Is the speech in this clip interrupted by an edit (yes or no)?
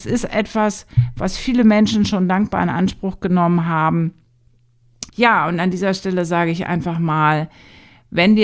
yes